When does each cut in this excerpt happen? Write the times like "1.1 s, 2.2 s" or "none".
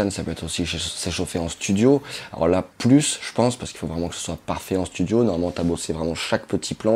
2.7 s